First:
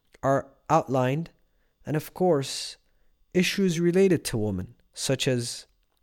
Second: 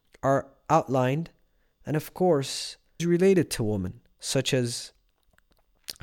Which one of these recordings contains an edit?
second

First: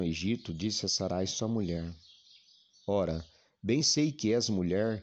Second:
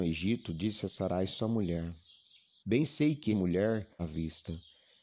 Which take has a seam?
second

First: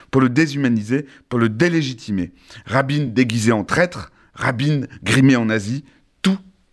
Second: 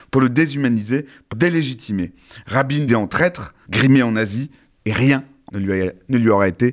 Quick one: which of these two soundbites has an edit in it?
second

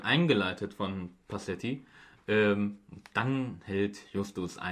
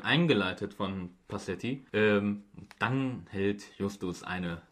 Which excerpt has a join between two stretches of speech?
second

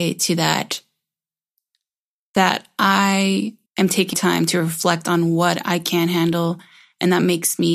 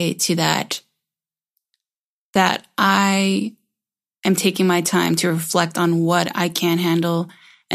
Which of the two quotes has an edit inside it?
first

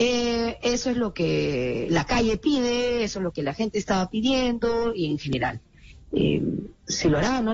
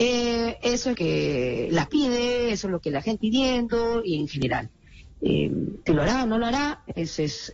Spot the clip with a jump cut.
second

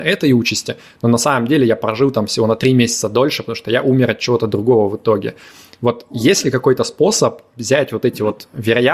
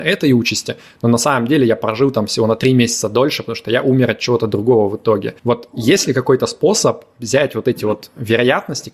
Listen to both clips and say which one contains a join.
second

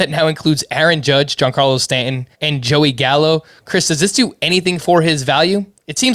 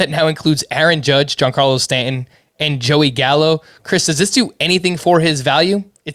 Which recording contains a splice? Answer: first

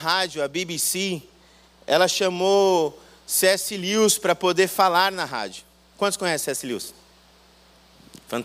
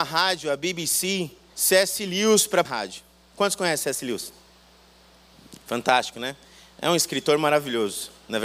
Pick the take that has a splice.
second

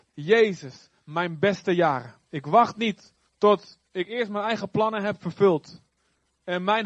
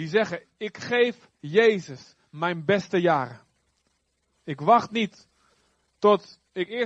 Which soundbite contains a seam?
first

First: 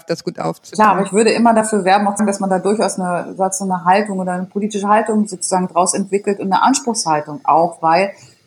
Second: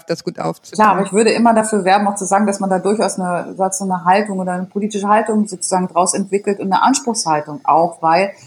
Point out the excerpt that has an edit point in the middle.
first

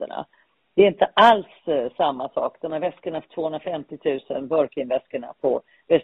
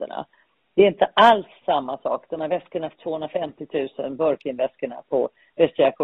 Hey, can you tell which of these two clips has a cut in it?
second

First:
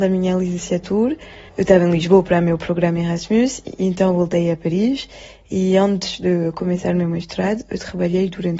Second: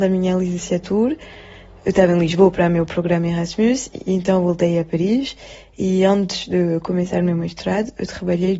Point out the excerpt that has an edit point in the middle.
first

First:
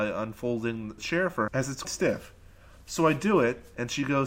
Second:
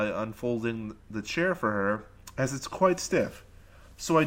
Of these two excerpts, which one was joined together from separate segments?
first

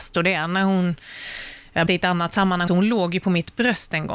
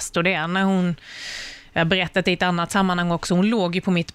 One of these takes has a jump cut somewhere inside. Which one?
first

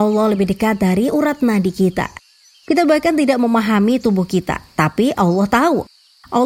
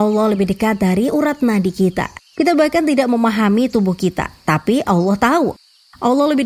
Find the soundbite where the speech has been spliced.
second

